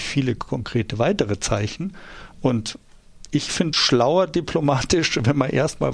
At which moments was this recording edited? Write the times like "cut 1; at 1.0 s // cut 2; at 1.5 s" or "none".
cut 1; at 3.7 s